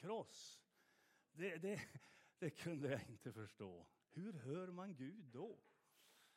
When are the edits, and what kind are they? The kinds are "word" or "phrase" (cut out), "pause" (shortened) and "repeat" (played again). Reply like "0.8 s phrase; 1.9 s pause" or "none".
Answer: 4.0 s pause